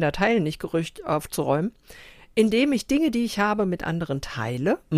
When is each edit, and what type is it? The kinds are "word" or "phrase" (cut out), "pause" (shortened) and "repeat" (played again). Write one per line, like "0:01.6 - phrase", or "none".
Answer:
none